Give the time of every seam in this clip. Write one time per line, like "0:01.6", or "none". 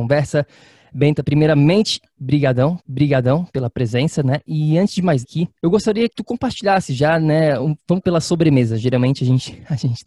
0:02.8
0:05.2
0:05.5
0:06.1
0:08.0